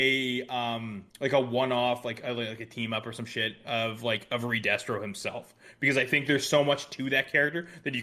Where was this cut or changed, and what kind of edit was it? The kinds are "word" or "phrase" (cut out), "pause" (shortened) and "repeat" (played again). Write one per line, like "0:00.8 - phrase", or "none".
0:01.1 - pause